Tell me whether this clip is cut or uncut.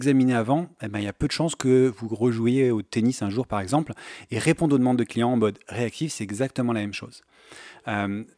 uncut